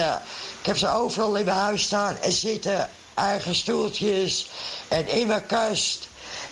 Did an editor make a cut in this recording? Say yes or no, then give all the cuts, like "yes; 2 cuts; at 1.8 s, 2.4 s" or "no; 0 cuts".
no; 0 cuts